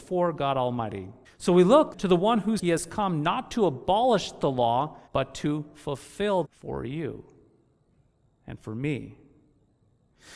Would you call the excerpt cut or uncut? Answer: cut